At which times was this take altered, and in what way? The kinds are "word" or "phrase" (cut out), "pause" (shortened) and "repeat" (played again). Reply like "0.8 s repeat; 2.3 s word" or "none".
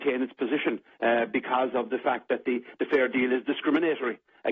none